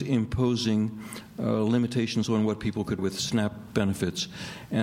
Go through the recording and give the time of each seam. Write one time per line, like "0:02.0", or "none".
0:03.0

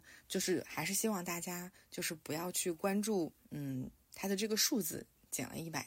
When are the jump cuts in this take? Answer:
0:03.4

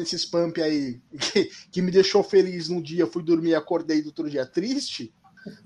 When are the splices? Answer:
0:01.1

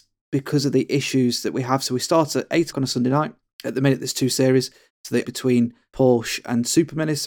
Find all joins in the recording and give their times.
0:02.7
0:05.2

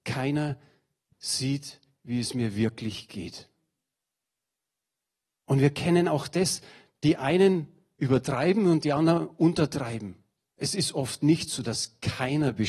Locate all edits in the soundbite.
none

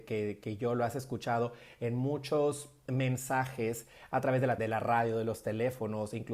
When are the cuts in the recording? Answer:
0:04.6

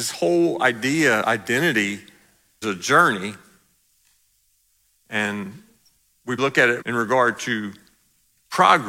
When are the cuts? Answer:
0:01.2
0:02.6
0:06.4
0:06.8

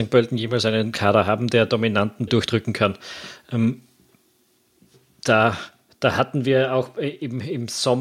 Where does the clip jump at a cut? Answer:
0:02.3

